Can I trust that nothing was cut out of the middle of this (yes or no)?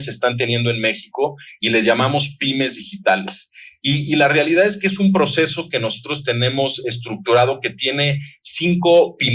yes